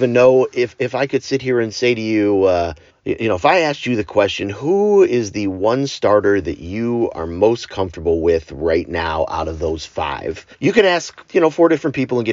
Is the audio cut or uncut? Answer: cut